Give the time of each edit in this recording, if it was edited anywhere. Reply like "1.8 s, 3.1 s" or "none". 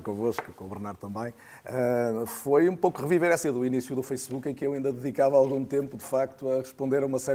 3.4 s

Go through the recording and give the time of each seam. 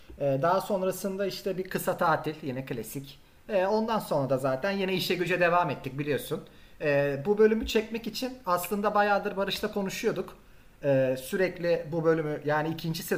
none

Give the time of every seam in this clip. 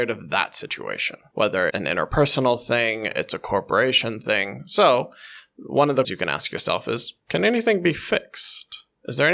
1.7 s, 6.0 s

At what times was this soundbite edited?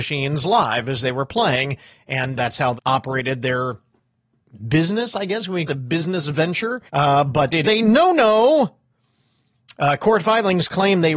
2.4 s, 2.8 s, 5.7 s, 6.9 s, 7.6 s

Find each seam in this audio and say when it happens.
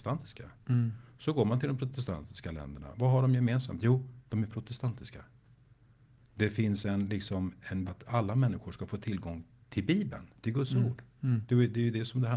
7.9 s

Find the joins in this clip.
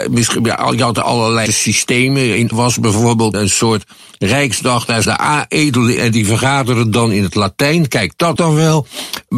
1.0 s, 1.5 s, 2.5 s, 3.3 s, 5.0 s, 6.0 s, 8.4 s

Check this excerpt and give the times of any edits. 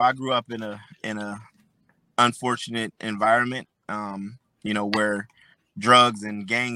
none

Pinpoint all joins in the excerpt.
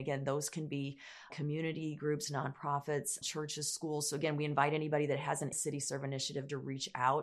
1.3 s, 3.2 s, 5.5 s

